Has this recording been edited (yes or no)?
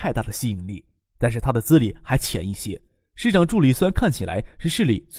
no